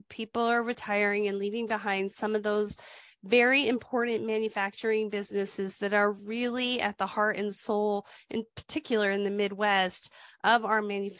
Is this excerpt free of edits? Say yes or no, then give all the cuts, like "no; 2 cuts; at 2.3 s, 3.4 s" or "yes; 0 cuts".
yes; 0 cuts